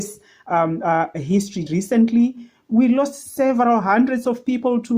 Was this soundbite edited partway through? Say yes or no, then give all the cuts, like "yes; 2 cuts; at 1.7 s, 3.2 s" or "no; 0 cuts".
yes; 1 cut; at 1.7 s